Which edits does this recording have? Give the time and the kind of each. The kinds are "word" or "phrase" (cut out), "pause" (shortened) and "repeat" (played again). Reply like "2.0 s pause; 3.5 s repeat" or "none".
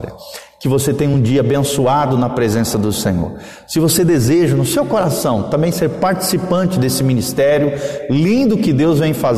none